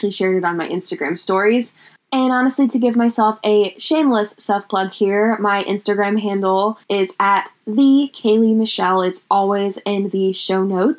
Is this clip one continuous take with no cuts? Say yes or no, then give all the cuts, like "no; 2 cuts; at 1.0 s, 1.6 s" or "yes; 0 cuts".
no; 1 cut; at 6.8 s